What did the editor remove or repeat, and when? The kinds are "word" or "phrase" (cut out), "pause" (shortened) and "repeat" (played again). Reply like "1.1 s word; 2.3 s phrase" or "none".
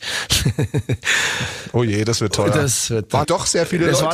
3.2 s word